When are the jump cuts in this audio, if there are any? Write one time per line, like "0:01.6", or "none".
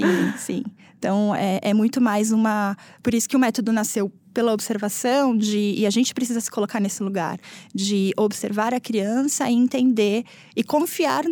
none